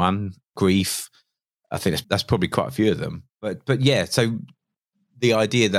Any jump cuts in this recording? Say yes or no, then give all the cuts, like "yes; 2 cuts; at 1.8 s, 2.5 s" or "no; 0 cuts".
yes; 1 cut; at 2.0 s